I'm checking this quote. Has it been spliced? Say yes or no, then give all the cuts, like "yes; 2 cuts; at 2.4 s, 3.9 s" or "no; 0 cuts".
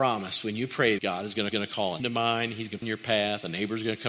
yes; 4 cuts; at 1.0 s, 1.5 s, 2.0 s, 2.8 s